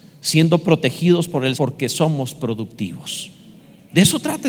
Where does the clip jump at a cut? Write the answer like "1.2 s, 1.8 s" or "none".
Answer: 1.5 s

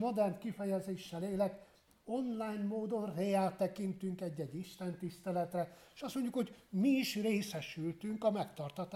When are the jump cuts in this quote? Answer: none

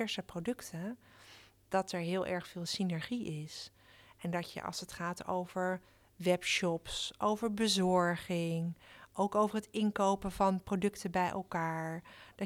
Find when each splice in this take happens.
none

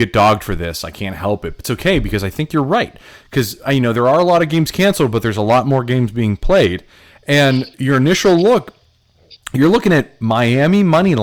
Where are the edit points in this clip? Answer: 1.6 s

